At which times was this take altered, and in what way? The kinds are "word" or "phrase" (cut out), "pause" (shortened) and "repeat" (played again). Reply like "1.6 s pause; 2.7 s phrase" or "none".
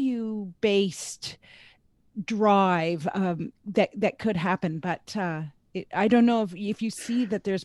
none

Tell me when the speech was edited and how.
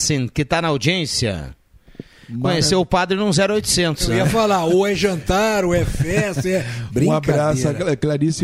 none

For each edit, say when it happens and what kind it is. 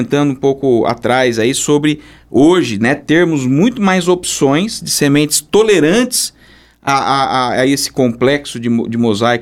none

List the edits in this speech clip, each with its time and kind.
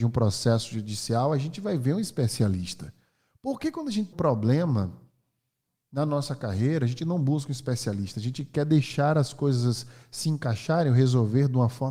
4.1 s word

